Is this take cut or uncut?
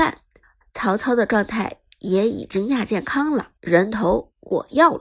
cut